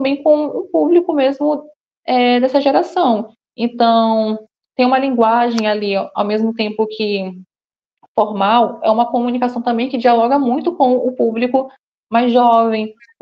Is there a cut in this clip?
no; 0 cuts

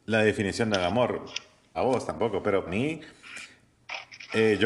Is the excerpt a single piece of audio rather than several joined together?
no; 2 cuts; at 1.7 s, 2.7 s

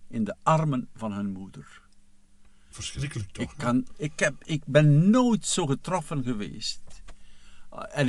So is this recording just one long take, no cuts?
yes; 0 cuts

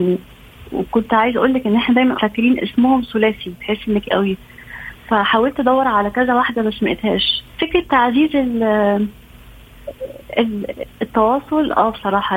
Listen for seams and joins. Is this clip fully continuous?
no; 3 cuts; at 2.1 s, 4.0 s, 7.5 s

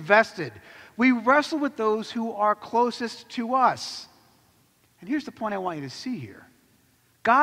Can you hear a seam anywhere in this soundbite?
no; 0 cuts

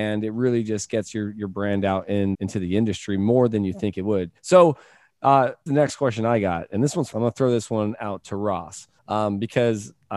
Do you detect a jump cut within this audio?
yes; 5 cuts; at 2.3 s, 4.4 s, 5.7 s, 7.1 s, 9.0 s

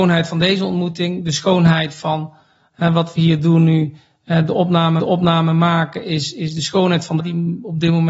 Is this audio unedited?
no; 3 cuts; at 2.7 s, 5.0 s, 7.2 s

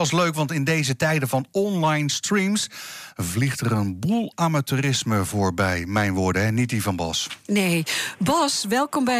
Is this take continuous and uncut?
yes; 0 cuts

